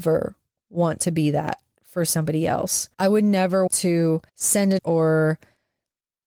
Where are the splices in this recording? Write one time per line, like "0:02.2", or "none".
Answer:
0:02.9
0:03.7
0:04.3
0:04.8